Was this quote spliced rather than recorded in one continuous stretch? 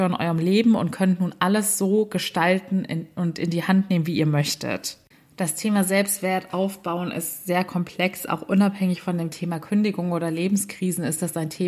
yes; 1 cut; at 5.1 s

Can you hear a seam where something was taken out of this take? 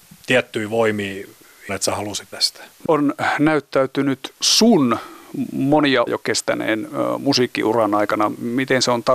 yes; 5 cuts; at 1.7 s, 2.3 s, 2.9 s, 4.4 s, 6.1 s

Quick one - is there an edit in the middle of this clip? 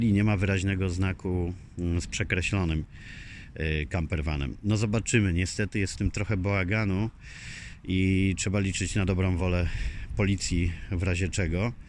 no; 0 cuts

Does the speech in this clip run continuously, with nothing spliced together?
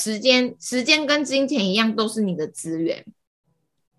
yes; 0 cuts

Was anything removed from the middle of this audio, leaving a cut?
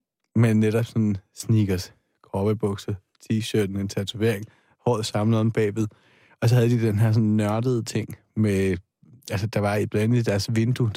no; 0 cuts

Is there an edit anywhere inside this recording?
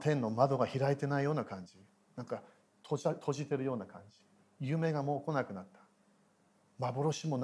no; 0 cuts

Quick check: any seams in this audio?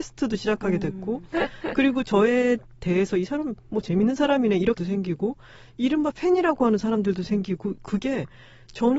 yes; 1 cut; at 4.8 s

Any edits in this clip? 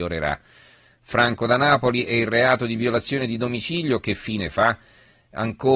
no; 0 cuts

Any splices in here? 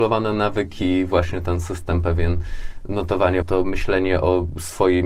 yes; 1 cut; at 3.4 s

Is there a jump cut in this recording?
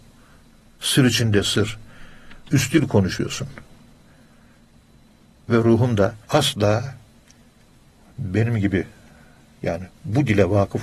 yes; 1 cut; at 6.2 s

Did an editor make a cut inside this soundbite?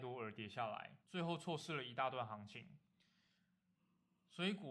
yes; 1 cut; at 1.0 s

